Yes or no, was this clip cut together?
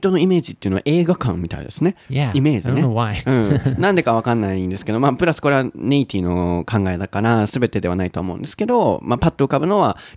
yes